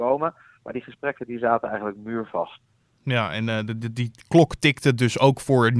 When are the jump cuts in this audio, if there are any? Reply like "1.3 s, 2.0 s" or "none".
none